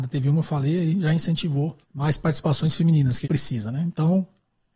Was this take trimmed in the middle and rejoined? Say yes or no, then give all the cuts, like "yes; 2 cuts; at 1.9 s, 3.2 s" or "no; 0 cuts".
yes; 2 cuts; at 1.8 s, 3.2 s